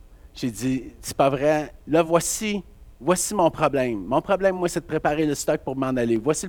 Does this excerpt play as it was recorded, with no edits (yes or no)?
yes